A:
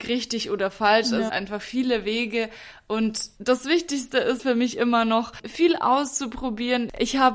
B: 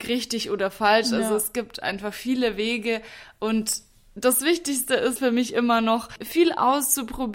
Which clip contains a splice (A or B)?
A